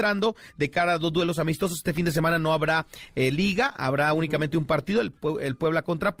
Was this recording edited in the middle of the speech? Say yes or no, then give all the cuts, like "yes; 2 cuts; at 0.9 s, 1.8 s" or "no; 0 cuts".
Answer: no; 0 cuts